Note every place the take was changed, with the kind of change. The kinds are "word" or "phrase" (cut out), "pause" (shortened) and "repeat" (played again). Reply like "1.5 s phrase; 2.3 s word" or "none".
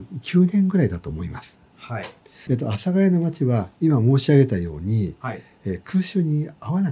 2.5 s word